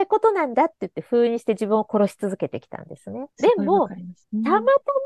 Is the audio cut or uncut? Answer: cut